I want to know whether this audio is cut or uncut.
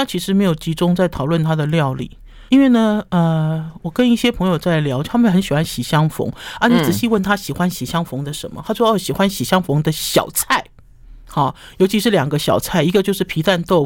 cut